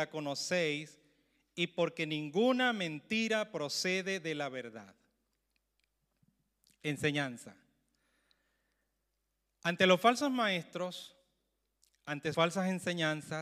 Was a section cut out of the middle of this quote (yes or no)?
yes